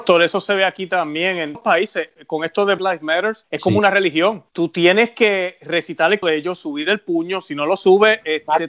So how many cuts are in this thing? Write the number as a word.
five